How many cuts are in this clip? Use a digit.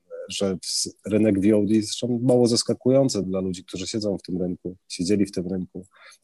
2